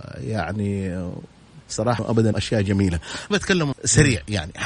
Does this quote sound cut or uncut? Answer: cut